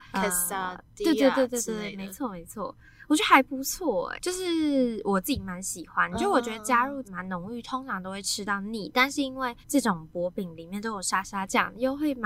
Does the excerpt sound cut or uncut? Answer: cut